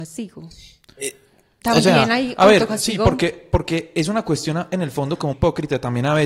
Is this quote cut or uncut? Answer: cut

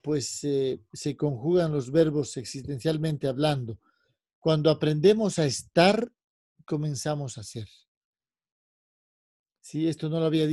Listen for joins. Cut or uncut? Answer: uncut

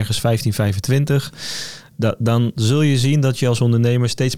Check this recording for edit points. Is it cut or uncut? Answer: uncut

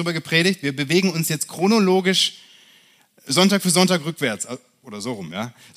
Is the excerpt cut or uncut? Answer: uncut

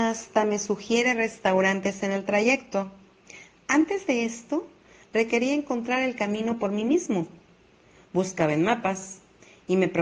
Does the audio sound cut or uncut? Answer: uncut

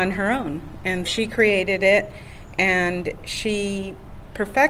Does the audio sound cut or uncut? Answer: cut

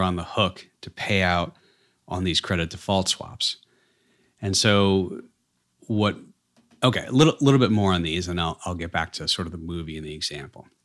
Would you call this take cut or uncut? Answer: uncut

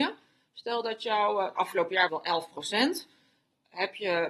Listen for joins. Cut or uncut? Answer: cut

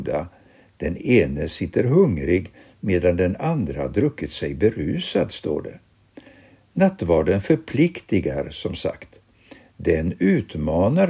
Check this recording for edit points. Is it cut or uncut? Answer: uncut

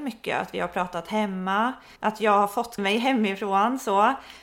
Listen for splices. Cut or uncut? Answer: cut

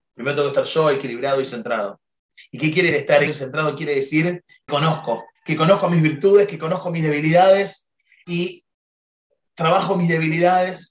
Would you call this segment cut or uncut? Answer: cut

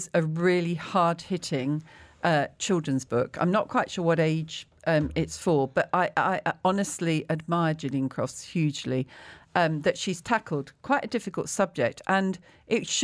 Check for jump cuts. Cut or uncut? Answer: uncut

